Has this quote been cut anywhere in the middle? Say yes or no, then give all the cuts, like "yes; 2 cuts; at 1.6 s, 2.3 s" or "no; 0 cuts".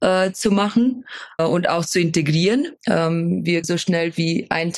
yes; 3 cuts; at 1.4 s, 2.8 s, 3.6 s